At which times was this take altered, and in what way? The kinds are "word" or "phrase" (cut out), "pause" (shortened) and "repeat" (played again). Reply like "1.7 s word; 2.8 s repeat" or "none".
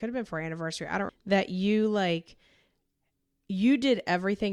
1.1 s word